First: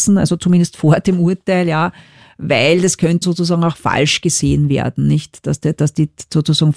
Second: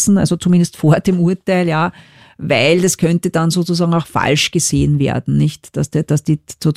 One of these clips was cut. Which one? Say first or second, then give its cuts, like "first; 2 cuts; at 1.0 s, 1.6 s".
first; 1 cut; at 3.2 s